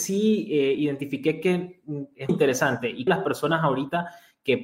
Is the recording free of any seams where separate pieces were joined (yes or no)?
no